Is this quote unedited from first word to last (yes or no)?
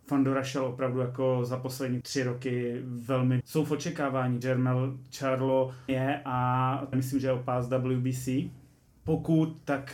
no